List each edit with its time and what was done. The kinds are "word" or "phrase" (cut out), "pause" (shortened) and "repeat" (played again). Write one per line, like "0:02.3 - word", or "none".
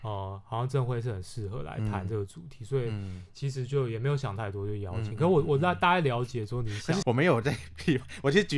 0:07.0 - word